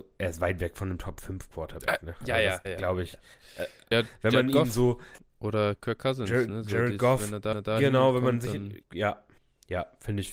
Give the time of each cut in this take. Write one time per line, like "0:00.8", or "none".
0:02.6
0:03.9
0:07.5
0:08.8

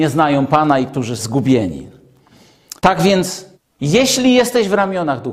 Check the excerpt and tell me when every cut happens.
0:01.2
0:02.8
0:03.5

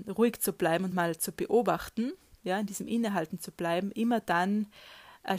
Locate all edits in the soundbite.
none

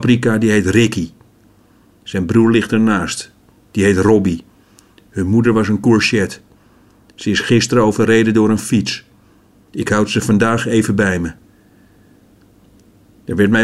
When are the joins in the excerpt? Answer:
none

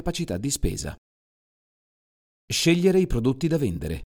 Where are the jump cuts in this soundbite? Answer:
none

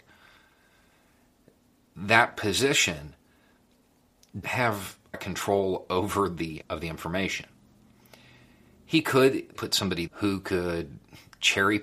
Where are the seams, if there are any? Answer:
0:04.4
0:05.1
0:06.6
0:09.5
0:10.1

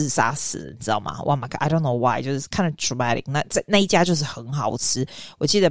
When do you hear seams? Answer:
none

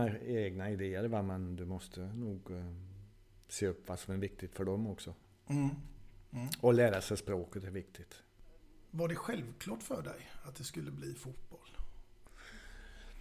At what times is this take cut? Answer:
none

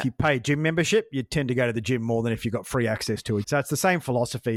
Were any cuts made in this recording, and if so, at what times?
0:03.4

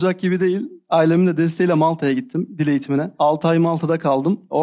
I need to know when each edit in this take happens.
none

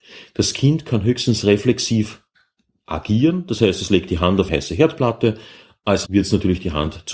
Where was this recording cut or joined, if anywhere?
0:04.5
0:06.0

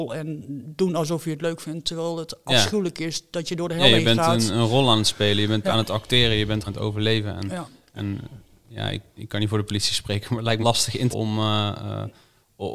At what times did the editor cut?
0:05.6
0:06.7
0:09.2
0:10.6
0:11.1

